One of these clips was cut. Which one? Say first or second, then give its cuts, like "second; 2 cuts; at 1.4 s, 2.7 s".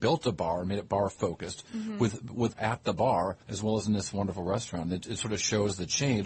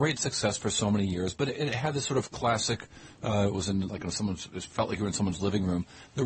first; 2 cuts; at 2.5 s, 3.4 s